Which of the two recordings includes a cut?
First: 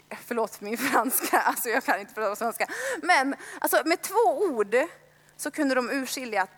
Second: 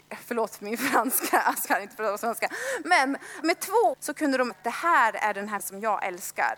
second; 5 cuts; at 1.7 s, 3.4 s, 3.9 s, 4.5 s, 5.6 s

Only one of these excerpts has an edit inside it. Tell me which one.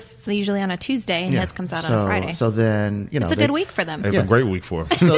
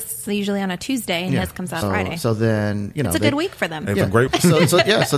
second; 2 cuts; at 1.8 s, 4.3 s

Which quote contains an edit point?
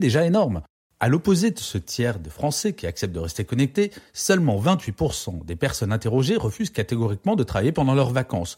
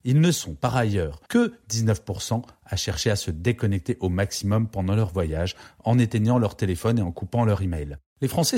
second; 1 cut; at 1.3 s

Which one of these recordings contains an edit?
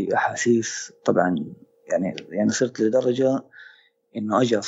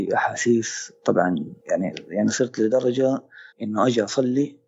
second; 2 cuts; at 1.6 s, 3.5 s

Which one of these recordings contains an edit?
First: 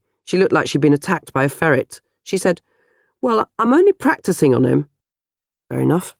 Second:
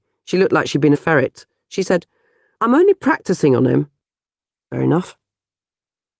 second; 2 cuts; at 0.9 s, 2.6 s

